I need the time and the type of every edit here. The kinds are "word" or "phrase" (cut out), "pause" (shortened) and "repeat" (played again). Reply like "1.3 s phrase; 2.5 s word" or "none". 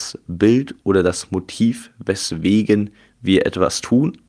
none